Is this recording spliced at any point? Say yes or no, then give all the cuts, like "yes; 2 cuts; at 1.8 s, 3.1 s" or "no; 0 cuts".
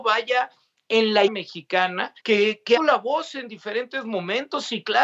yes; 3 cuts; at 1.3 s, 2.2 s, 2.8 s